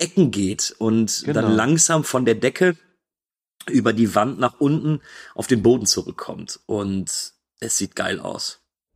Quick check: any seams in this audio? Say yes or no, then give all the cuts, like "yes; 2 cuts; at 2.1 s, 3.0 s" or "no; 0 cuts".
no; 0 cuts